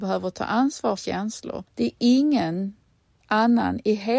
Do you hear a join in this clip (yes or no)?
yes